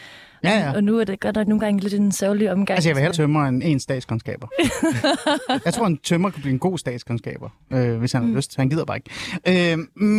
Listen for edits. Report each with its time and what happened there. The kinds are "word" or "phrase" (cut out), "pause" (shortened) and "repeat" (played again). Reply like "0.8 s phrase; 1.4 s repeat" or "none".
3.1 s word